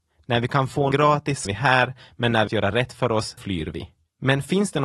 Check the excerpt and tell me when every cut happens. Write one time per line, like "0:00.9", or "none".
0:00.9
0:01.4
0:02.5
0:03.4